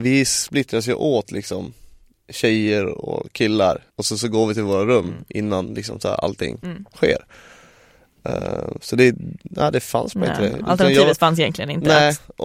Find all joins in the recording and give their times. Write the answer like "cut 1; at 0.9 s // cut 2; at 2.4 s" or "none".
cut 1; at 3.9 s